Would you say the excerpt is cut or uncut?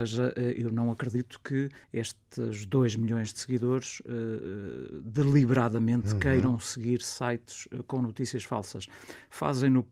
cut